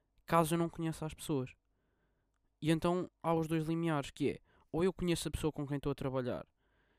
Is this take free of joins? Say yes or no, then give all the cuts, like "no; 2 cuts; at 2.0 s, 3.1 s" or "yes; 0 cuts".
yes; 0 cuts